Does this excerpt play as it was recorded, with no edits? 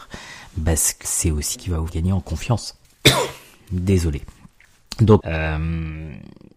no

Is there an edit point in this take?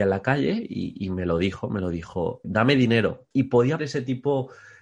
yes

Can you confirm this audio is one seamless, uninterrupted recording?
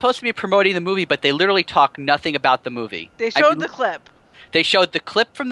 yes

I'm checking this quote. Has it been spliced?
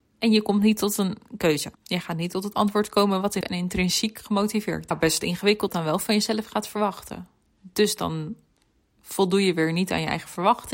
yes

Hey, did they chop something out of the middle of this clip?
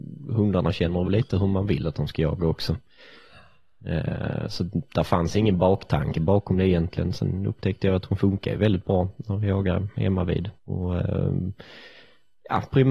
yes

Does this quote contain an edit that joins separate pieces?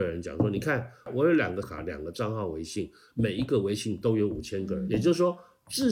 yes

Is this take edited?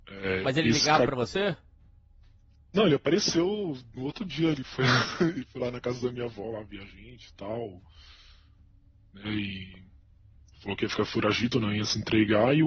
no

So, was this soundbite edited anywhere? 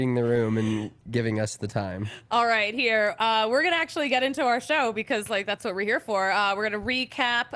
no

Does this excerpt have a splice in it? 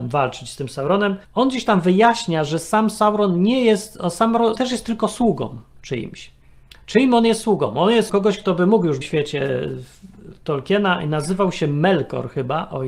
yes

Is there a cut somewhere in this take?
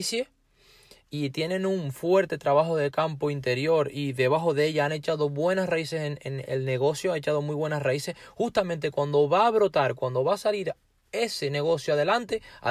no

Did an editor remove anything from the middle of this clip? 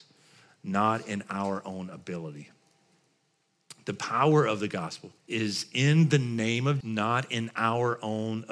yes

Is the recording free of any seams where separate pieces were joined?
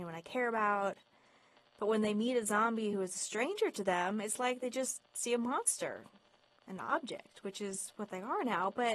yes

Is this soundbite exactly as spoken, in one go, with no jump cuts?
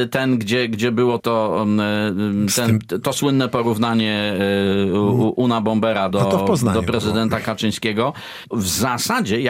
no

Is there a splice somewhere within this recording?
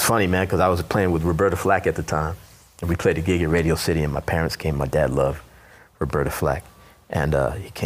no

